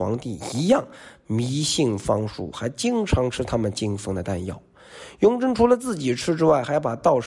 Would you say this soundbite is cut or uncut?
uncut